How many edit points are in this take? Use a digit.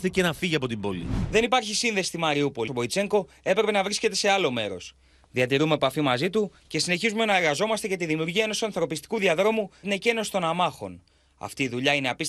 2